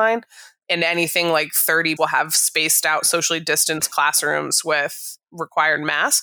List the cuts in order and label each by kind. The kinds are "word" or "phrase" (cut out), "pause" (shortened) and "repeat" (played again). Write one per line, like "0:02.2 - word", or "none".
0:02.0 - phrase